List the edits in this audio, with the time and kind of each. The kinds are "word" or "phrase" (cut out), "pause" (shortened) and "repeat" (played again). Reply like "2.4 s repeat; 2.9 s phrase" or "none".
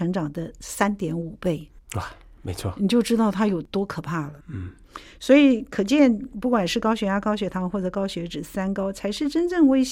1.8 s pause; 4.4 s pause